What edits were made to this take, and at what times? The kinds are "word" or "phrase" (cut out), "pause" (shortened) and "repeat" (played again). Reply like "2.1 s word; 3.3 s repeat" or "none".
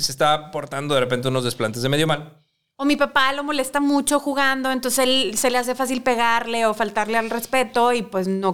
none